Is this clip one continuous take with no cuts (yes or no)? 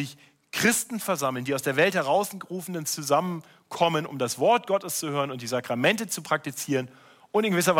yes